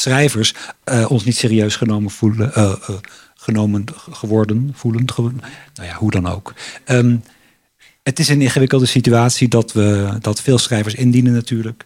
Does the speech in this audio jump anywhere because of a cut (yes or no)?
no